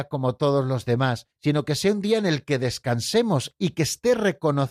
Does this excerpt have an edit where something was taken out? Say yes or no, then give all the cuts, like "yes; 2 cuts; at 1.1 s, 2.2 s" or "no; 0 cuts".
yes; 1 cut; at 1.3 s